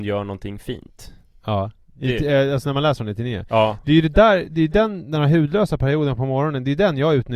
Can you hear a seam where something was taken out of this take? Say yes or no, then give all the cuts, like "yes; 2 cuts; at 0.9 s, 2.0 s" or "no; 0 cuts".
no; 0 cuts